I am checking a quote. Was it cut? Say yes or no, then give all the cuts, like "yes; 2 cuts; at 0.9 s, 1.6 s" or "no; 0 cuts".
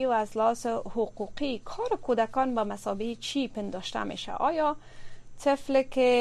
no; 0 cuts